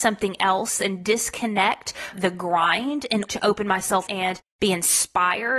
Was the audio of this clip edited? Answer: yes; 3 cuts; at 2.1 s, 3.3 s, 4.1 s

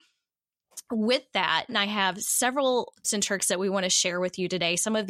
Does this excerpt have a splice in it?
yes; 2 cuts; at 1.7 s, 3.0 s

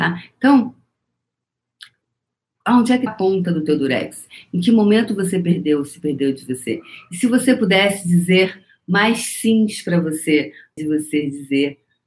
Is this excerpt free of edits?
no; 2 cuts; at 3.1 s, 10.8 s

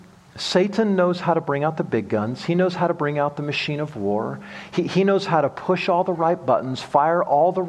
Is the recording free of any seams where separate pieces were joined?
yes; 0 cuts

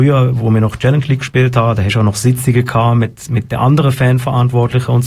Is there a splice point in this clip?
no; 0 cuts

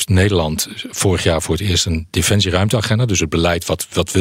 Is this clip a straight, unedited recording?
yes; 0 cuts

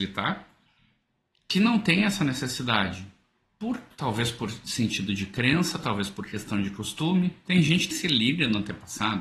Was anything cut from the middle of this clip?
yes; 2 cuts; at 3.9 s, 7.9 s

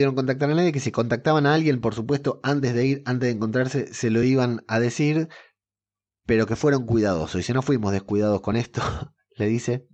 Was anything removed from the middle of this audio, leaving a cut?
no; 0 cuts

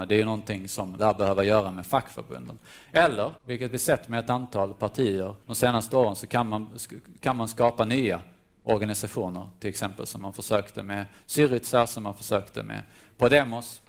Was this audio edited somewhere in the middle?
yes; 3 cuts; at 1.0 s, 3.4 s, 5.4 s

